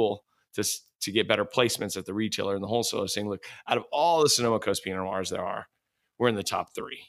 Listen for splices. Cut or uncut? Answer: uncut